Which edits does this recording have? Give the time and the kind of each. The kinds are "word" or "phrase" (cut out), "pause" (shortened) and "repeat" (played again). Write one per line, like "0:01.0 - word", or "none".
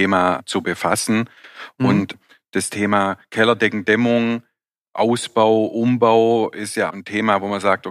0:06.9 - word